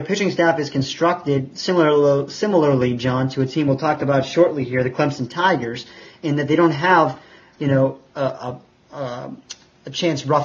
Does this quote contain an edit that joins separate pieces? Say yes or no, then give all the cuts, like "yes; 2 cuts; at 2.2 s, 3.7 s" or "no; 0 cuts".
no; 0 cuts